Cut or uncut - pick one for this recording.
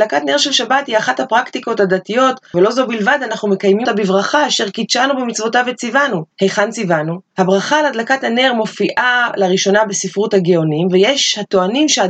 cut